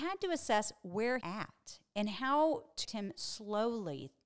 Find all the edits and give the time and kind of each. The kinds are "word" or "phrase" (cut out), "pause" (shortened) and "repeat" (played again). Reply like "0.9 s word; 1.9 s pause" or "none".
1.2 s phrase; 2.8 s word